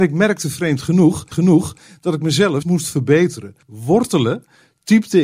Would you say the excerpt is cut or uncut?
cut